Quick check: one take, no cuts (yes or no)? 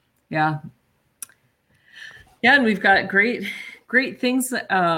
yes